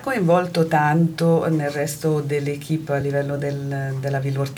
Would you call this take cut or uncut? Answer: uncut